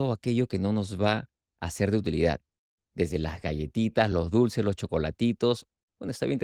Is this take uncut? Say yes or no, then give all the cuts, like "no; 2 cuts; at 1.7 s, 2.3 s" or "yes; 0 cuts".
yes; 0 cuts